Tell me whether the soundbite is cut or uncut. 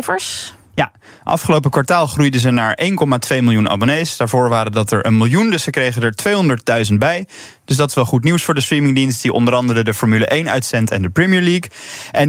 uncut